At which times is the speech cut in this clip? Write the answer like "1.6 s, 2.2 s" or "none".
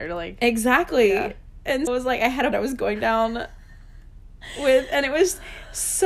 1.9 s, 2.5 s